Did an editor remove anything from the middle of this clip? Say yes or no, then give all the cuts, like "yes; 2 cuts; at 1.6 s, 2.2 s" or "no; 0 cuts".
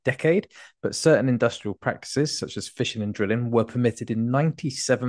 no; 0 cuts